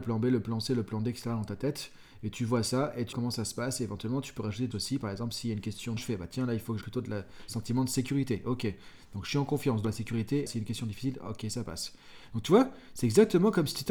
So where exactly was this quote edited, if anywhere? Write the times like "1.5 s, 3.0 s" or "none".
3.1 s, 4.7 s, 6.0 s, 6.8 s, 9.8 s, 10.5 s

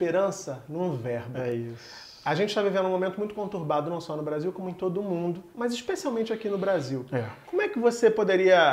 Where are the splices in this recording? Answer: 5.5 s, 7.4 s

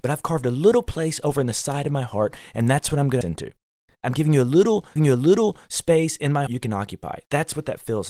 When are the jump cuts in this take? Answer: 3.2 s, 5.0 s, 6.5 s

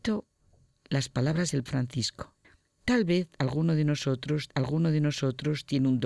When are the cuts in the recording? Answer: 1.7 s, 2.4 s, 4.5 s

